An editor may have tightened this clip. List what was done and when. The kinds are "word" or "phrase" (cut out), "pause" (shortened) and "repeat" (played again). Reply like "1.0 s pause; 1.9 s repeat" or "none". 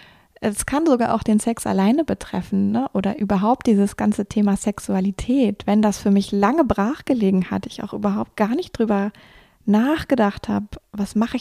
none